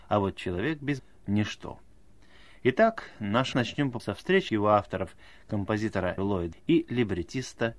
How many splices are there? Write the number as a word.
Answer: six